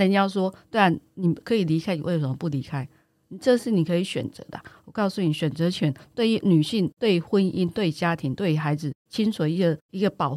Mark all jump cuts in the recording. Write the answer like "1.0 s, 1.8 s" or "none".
none